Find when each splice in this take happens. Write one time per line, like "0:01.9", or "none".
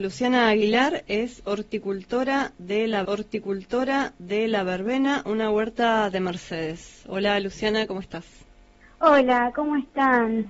0:03.0